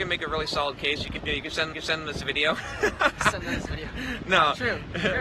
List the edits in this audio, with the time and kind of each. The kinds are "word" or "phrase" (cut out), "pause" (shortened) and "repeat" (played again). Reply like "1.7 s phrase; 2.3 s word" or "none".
1.2 s word; 1.7 s repeat